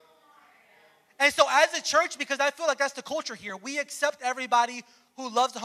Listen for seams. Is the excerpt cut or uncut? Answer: uncut